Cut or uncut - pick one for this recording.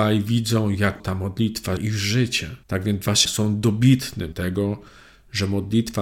cut